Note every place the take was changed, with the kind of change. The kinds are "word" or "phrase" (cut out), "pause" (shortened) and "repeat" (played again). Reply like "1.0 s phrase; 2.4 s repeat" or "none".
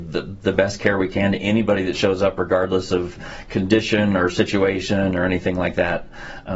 none